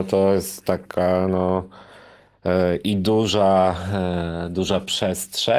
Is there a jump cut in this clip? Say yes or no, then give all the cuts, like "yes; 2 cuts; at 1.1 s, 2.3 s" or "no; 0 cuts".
no; 0 cuts